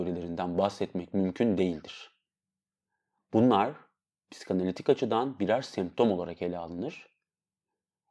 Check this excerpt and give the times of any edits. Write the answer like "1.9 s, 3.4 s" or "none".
none

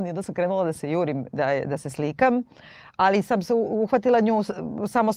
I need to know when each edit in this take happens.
none

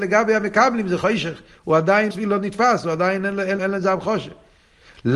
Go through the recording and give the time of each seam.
2.1 s, 3.6 s

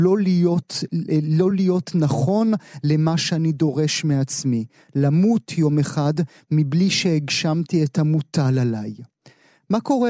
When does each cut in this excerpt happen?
none

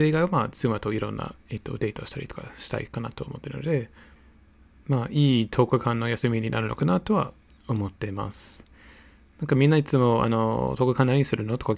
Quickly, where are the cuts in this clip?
none

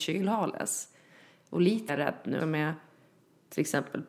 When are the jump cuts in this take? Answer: 1.9 s, 2.4 s

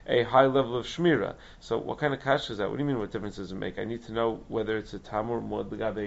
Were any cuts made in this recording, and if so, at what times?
none

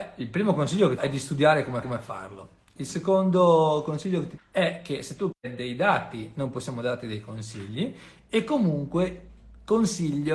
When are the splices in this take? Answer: 1.0 s, 1.8 s, 2.8 s, 4.4 s, 5.3 s

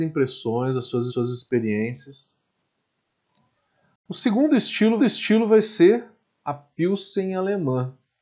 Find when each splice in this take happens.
1.1 s, 5.0 s, 6.2 s

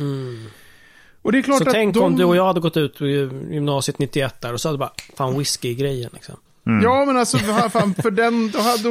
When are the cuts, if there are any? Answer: none

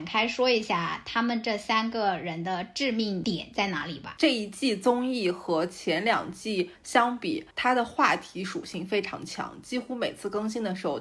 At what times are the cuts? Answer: 6.8 s, 7.5 s

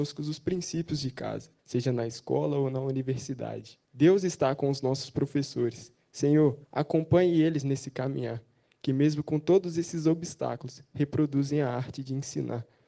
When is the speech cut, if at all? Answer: 1.6 s, 3.8 s, 6.6 s

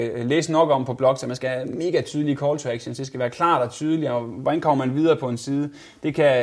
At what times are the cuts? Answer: none

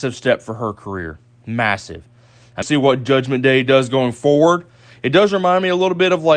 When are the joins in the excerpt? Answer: 2.6 s

